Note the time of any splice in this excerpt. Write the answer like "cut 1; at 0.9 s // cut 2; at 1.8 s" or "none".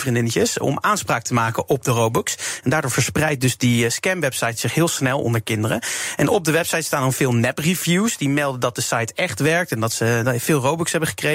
none